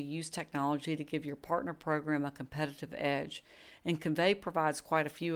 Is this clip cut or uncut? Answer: uncut